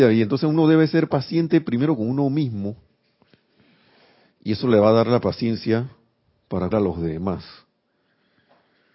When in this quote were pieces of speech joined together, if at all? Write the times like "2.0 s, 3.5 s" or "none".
6.7 s